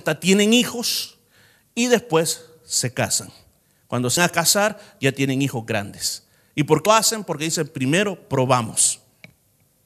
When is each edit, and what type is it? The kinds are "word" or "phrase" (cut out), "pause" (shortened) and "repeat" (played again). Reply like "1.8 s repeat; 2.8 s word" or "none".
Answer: 4.2 s word; 6.9 s word